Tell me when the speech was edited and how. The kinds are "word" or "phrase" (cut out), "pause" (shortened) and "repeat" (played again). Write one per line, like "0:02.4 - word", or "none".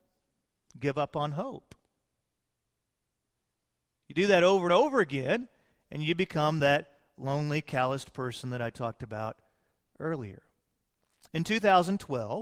none